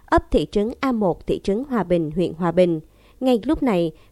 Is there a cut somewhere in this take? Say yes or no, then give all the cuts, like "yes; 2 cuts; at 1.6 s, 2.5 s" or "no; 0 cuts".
no; 0 cuts